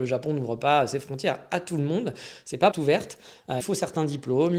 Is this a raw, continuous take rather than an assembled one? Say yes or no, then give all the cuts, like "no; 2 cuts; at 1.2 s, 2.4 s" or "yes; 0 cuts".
no; 2 cuts; at 2.7 s, 3.6 s